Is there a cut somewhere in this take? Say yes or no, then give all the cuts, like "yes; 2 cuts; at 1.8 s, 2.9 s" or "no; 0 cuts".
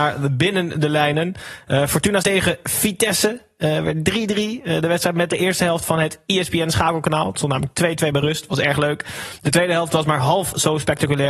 yes; 2 cuts; at 2.2 s, 5.3 s